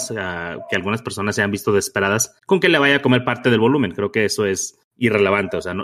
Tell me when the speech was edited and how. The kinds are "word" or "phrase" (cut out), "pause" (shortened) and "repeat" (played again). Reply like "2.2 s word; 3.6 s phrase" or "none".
2.4 s pause; 4.9 s pause